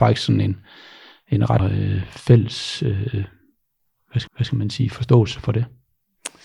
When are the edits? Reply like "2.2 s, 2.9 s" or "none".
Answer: 1.6 s, 4.3 s